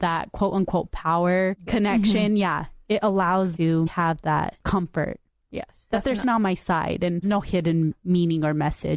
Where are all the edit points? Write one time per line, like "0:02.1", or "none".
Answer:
0:01.7
0:03.6
0:03.9
0:06.2
0:07.2